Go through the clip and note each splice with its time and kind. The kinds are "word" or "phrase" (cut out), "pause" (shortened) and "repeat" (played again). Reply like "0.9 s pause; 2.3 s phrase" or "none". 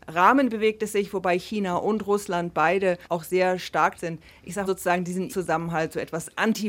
3.0 s pause; 3.9 s phrase; 4.6 s word; 5.3 s word